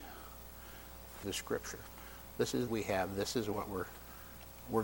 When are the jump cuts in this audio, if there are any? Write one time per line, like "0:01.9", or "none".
0:01.2
0:02.7